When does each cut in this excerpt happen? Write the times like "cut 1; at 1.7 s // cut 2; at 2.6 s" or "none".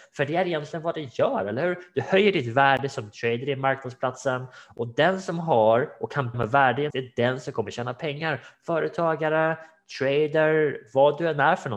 cut 1; at 6.3 s // cut 2; at 6.9 s